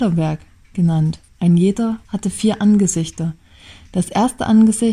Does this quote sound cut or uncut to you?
cut